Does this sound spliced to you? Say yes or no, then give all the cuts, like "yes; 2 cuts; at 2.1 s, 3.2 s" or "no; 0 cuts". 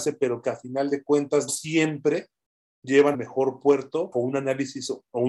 yes; 3 cuts; at 1.5 s, 3.1 s, 4.1 s